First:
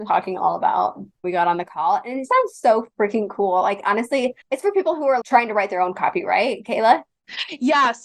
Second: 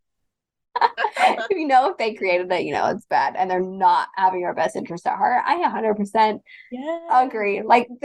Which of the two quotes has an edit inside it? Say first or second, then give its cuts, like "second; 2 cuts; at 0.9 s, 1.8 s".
first; 4 cuts; at 1.2 s, 2.3 s, 4.4 s, 5.2 s